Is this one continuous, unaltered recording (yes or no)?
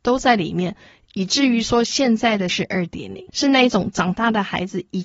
no